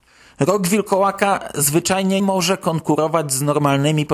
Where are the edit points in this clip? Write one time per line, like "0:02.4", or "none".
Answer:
0:02.2